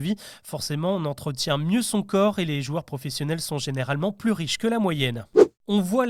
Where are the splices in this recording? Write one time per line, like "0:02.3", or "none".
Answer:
none